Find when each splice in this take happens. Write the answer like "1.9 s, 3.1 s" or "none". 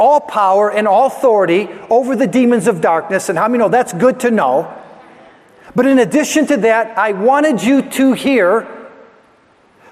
none